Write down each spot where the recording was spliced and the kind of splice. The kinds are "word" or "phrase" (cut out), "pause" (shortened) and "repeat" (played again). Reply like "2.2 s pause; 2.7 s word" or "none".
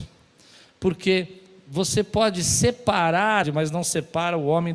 3.4 s phrase